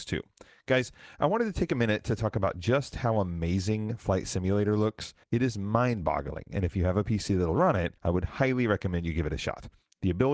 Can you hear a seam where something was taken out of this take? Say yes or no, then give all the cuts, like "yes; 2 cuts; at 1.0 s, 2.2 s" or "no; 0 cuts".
yes; 2 cuts; at 5.2 s, 8.0 s